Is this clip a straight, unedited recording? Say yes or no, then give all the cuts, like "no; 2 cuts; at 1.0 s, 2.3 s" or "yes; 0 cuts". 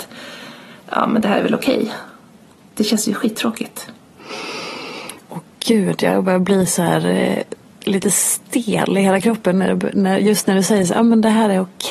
yes; 0 cuts